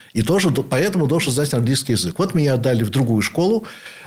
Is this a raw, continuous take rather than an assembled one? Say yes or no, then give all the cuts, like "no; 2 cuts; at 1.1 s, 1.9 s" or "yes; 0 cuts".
yes; 0 cuts